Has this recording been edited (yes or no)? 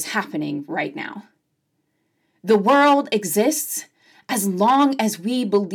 no